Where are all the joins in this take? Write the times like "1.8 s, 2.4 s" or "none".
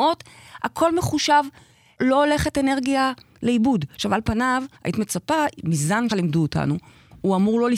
2.0 s, 3.9 s, 4.7 s, 6.1 s